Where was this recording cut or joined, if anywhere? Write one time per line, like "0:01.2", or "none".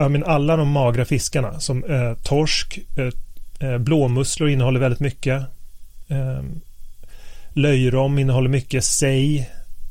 none